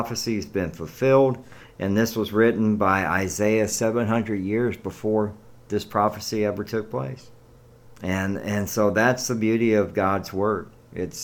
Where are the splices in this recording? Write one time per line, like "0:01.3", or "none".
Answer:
none